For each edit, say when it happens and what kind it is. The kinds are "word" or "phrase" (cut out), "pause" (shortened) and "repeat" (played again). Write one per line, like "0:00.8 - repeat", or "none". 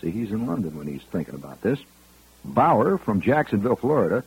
none